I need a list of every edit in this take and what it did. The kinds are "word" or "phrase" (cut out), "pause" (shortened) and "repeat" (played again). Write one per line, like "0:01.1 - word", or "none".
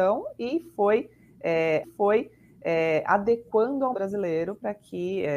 0:01.8 - repeat
0:03.9 - word